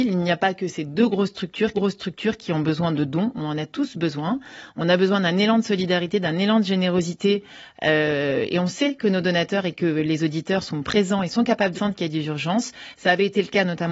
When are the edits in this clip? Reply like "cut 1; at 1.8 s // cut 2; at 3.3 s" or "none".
cut 1; at 1.7 s // cut 2; at 11.7 s

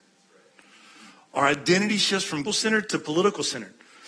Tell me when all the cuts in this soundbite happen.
cut 1; at 2.4 s

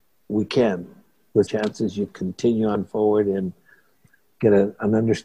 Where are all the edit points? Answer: cut 1; at 1.5 s // cut 2; at 2.1 s

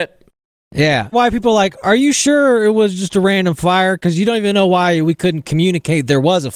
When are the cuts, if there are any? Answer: cut 1; at 1.1 s

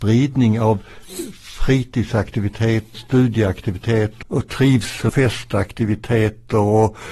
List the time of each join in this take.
cut 1; at 2.9 s // cut 2; at 4.2 s // cut 3; at 5.1 s

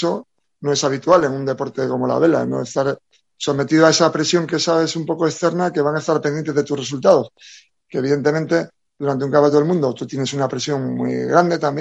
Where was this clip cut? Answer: none

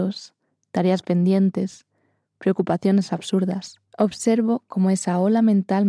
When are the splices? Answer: cut 1; at 3.9 s

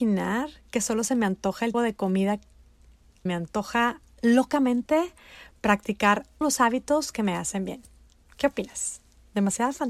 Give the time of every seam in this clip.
cut 1; at 1.7 s // cut 2; at 3.3 s // cut 3; at 6.4 s

